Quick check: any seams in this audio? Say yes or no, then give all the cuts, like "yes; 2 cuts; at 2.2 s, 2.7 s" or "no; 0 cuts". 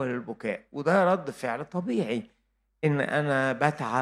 no; 0 cuts